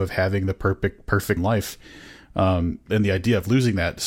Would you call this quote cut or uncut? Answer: cut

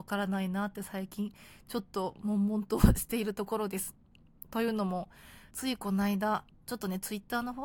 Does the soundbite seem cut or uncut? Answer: cut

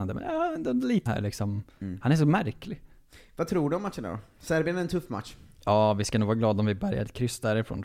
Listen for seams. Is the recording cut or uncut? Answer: cut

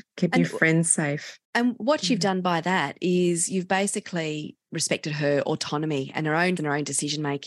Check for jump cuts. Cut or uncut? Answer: cut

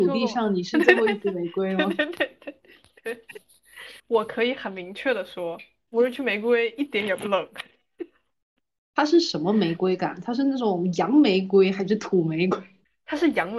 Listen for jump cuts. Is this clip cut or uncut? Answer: uncut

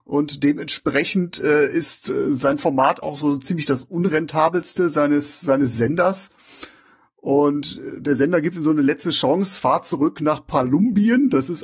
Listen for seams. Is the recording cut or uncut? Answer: uncut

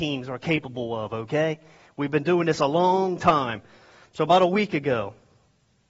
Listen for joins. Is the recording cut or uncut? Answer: uncut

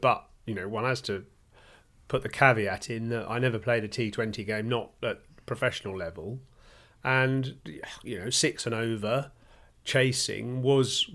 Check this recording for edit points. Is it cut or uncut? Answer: uncut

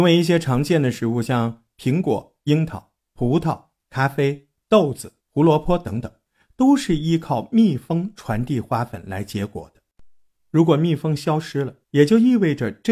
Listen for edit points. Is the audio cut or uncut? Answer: cut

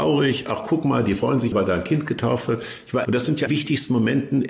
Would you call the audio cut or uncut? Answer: cut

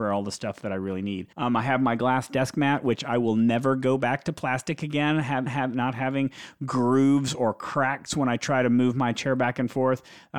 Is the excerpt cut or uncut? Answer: cut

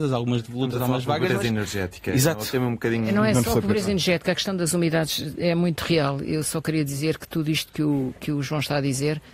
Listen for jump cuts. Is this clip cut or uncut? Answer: uncut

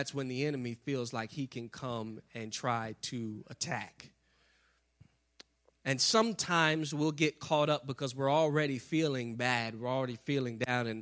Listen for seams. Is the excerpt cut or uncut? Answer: uncut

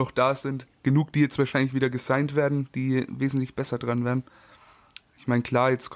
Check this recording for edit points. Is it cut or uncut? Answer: uncut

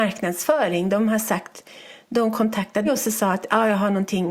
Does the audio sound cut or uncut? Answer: cut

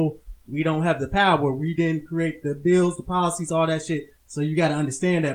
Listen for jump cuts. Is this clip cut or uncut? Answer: cut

